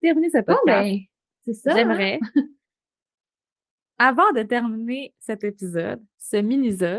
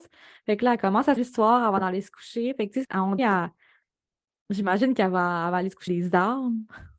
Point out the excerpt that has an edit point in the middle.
second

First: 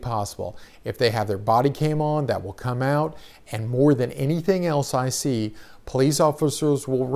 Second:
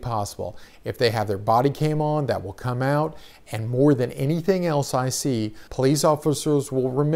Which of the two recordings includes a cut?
second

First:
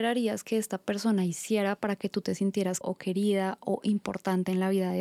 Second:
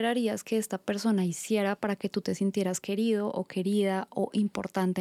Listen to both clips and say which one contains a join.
first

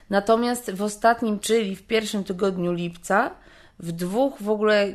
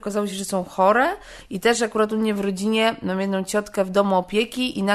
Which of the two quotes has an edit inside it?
first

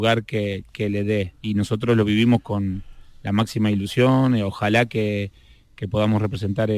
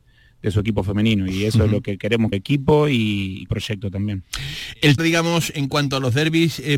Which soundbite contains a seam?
second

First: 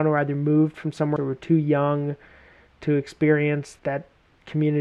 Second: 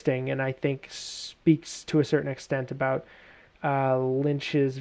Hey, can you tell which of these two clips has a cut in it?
first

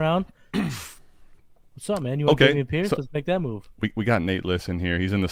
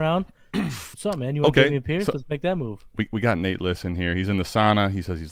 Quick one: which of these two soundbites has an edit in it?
second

